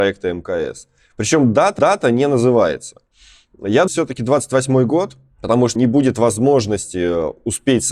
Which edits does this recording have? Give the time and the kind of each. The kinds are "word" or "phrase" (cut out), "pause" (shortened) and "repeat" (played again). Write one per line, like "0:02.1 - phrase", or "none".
0:01.8 - repeat
0:03.9 - phrase
0:05.8 - phrase